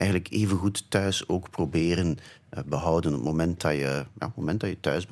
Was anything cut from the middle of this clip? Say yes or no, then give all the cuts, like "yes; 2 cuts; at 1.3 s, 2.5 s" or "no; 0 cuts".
no; 0 cuts